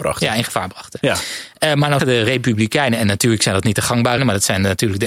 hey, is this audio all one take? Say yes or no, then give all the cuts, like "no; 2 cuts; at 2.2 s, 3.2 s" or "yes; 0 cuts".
no; 2 cuts; at 2.0 s, 4.2 s